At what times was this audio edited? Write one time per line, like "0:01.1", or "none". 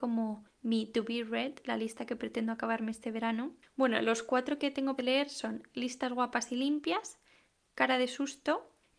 0:05.0